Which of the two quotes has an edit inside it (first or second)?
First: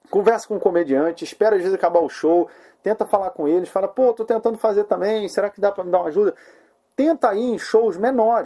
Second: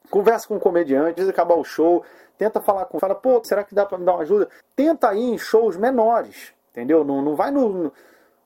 second